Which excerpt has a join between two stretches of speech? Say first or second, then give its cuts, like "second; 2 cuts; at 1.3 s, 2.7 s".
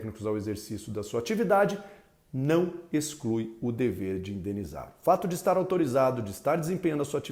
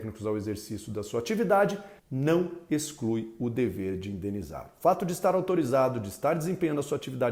second; 1 cut; at 2.0 s